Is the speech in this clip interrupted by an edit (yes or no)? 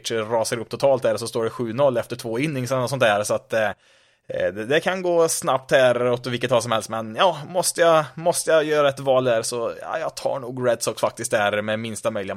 no